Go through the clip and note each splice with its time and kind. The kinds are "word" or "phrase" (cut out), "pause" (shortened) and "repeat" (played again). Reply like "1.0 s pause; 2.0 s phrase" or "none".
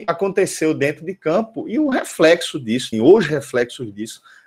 2.9 s word